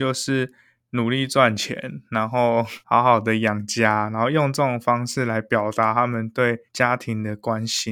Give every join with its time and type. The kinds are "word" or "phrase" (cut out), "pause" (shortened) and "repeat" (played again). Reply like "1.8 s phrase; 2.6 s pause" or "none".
2.8 s pause; 6.7 s pause